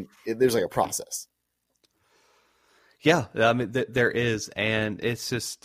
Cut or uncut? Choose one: uncut